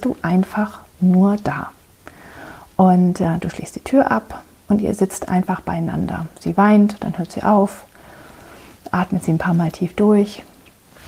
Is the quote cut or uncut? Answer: uncut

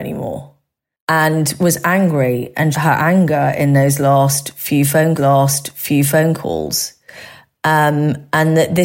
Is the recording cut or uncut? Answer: cut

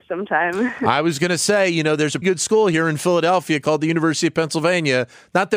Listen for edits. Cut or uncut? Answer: cut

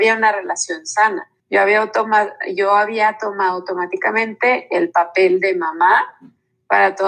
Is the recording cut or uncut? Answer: cut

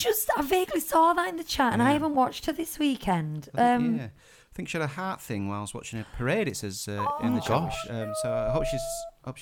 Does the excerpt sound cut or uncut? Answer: uncut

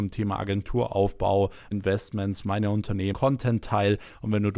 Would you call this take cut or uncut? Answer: cut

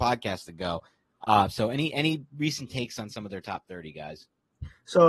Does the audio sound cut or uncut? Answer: uncut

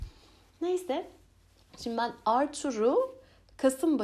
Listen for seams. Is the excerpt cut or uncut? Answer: uncut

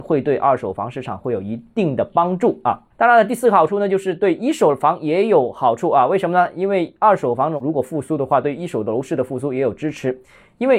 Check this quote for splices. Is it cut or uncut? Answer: uncut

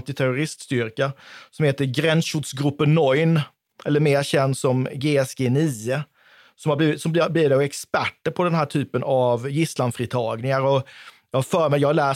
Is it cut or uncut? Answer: uncut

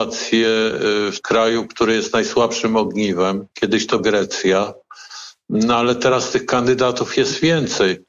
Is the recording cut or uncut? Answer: cut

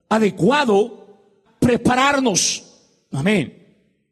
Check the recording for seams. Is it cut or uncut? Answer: cut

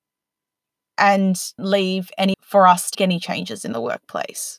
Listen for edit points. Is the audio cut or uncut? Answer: cut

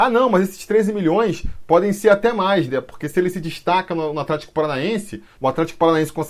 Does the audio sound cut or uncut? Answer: uncut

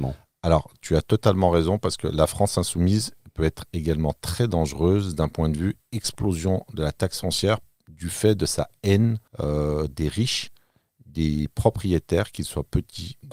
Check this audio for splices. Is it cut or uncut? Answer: cut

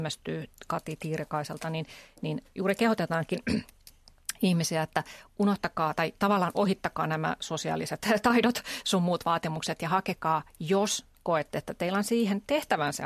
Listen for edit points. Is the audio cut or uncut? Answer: uncut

